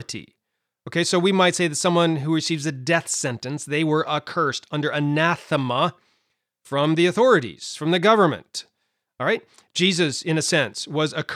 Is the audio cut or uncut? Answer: uncut